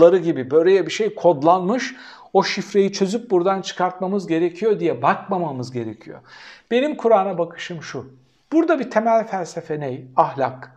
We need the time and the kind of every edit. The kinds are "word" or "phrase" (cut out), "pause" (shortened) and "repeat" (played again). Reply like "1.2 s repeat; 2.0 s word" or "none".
none